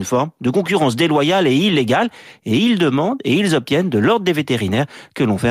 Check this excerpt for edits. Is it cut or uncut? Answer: uncut